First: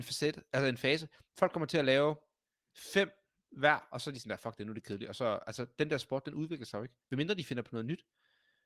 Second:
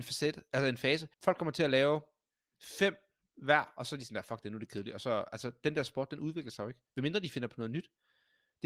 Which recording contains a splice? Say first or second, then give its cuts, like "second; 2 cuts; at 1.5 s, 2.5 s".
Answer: second; 1 cut; at 1.1 s